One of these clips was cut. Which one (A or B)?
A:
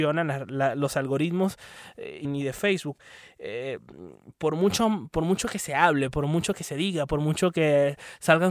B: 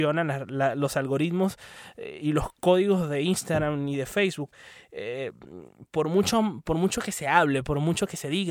A